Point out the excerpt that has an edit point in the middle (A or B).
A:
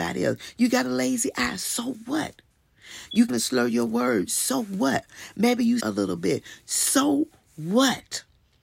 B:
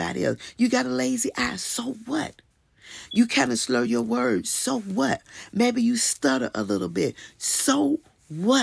A